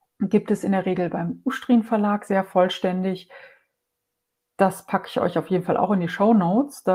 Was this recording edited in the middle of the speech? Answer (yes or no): no